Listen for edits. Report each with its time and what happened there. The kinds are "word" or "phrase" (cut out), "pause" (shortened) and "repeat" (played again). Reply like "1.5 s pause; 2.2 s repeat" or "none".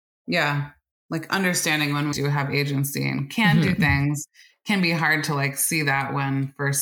2.1 s word